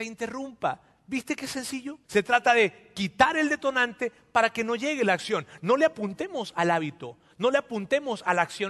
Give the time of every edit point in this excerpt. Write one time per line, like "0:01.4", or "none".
0:02.0

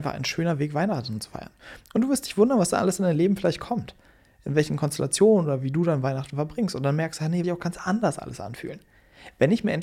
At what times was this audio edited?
0:07.4

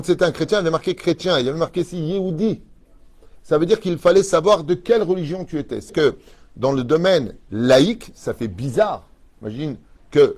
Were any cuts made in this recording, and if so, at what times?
0:05.9

